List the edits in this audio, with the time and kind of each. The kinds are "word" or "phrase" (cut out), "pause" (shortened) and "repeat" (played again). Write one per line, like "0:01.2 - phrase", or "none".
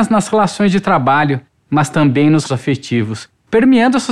0:02.4 - word